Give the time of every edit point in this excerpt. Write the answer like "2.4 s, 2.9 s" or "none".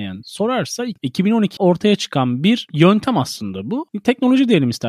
1.6 s